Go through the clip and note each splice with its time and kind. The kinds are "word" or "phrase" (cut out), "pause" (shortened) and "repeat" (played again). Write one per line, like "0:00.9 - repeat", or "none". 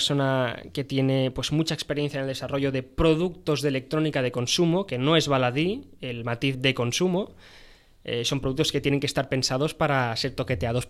0:06.5 - word